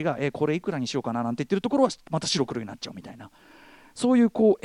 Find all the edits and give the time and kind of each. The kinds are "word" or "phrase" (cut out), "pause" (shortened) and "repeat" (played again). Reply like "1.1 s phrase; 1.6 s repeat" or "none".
none